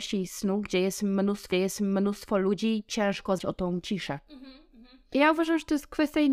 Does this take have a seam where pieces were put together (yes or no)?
yes